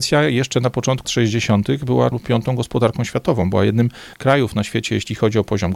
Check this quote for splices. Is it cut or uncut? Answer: cut